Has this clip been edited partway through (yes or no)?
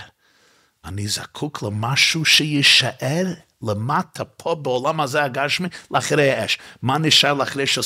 no